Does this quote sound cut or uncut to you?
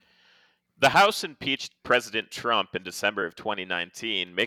uncut